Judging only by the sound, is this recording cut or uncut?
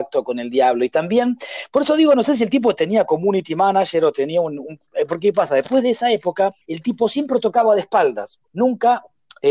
cut